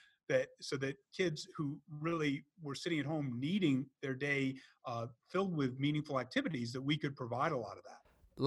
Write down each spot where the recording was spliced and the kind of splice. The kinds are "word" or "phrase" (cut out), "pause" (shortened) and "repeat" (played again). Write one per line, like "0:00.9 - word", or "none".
none